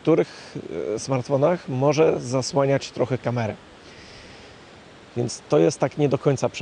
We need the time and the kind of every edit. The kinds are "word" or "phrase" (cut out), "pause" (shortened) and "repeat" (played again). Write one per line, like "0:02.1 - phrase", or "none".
none